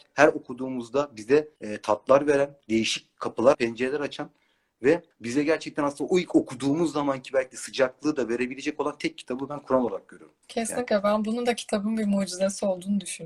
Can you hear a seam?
yes; 5 cuts; at 1.6 s, 2.6 s, 3.5 s, 5.1 s, 10.4 s

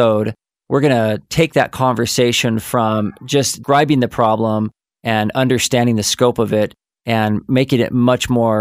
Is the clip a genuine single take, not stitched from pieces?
yes; 0 cuts

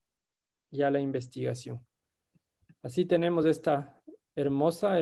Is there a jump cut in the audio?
no; 0 cuts

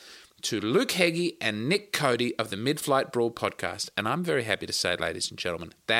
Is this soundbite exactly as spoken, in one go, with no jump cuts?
yes; 0 cuts

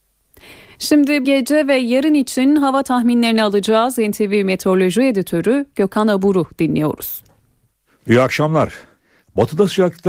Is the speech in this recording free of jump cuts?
no; 1 cut; at 1.2 s

